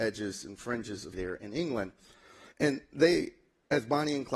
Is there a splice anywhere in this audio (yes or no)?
yes